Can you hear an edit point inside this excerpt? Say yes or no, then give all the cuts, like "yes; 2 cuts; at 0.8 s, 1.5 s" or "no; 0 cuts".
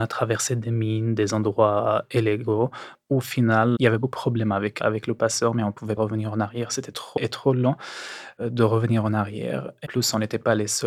yes; 6 cuts; at 3.8 s, 4.1 s, 4.8 s, 6.0 s, 7.2 s, 9.8 s